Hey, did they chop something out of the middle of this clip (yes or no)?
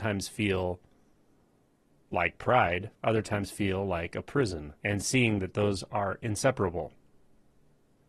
yes